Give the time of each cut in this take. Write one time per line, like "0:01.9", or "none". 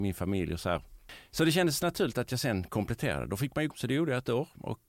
0:03.7